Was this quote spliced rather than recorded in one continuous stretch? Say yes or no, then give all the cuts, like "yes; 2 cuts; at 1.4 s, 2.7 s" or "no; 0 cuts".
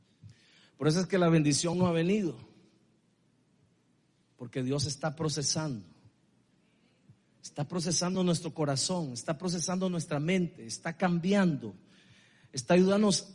no; 0 cuts